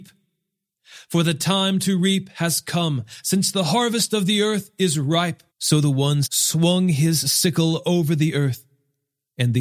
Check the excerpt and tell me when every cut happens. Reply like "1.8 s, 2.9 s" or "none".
5.5 s, 6.2 s

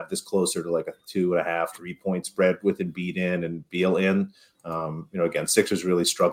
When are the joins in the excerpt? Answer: none

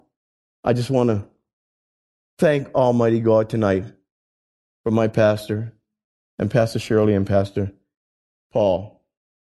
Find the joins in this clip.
none

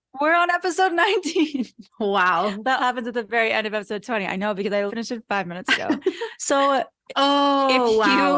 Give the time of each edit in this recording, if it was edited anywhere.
1.9 s, 2.8 s, 4.9 s

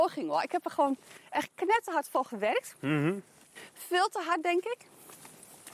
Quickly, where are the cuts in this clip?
none

